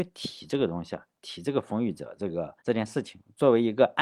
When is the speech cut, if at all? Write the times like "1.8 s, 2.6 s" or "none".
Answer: 2.6 s

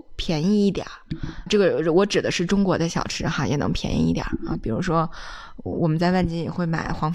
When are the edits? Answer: 1.5 s

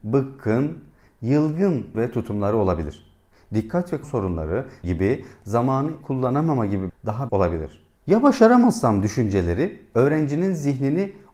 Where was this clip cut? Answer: 1.9 s, 4.0 s, 4.8 s, 6.0 s, 6.9 s, 7.3 s, 8.0 s

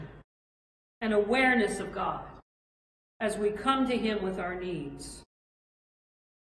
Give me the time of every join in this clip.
none

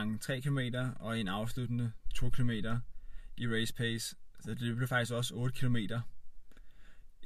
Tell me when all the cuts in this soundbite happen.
none

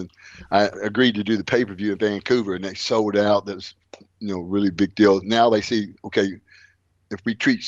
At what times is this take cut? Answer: none

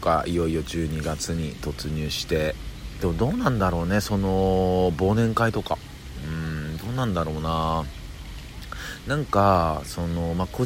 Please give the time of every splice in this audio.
3.0 s

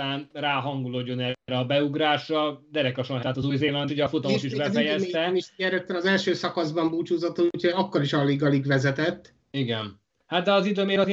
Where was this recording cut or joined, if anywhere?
3.2 s, 3.9 s, 9.4 s

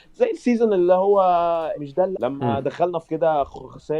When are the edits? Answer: 1.7 s, 2.1 s, 3.0 s

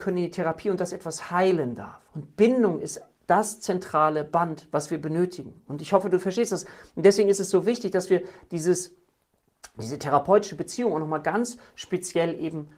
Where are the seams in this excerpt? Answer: 2.1 s

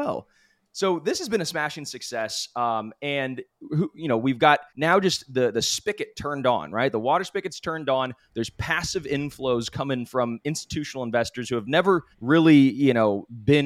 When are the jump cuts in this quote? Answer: 4.7 s, 12.1 s

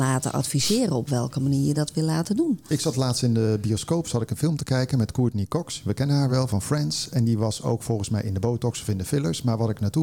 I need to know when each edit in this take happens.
none

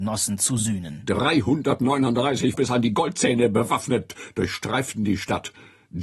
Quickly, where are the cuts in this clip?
2.5 s

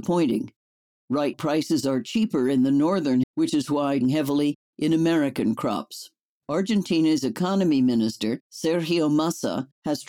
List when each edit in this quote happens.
1.3 s, 3.2 s, 4.0 s, 6.4 s

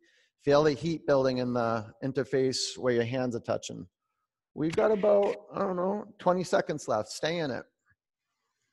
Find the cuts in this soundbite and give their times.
none

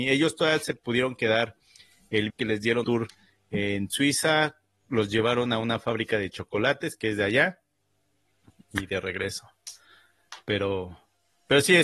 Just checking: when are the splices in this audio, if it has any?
2.3 s, 2.8 s

